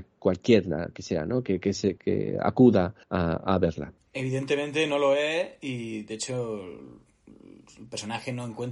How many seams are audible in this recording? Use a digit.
2